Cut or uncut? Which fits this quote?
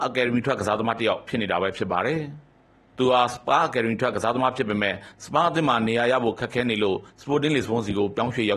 cut